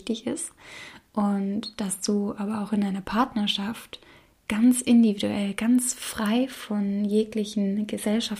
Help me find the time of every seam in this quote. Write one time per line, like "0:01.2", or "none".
none